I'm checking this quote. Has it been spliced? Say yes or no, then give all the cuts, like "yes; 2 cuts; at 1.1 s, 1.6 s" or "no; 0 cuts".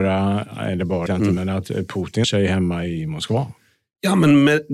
yes; 2 cuts; at 1.1 s, 2.2 s